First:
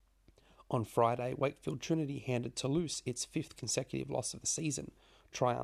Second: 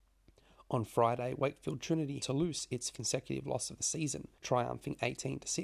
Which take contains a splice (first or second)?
second